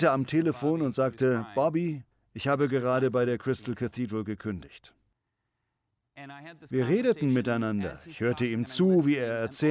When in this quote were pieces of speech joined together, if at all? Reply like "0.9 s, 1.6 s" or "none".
2.1 s